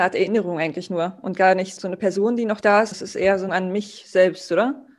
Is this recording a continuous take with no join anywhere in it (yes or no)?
no